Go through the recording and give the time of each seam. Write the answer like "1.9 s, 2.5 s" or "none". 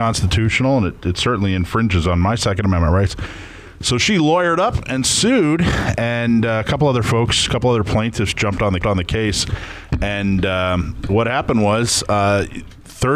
8.8 s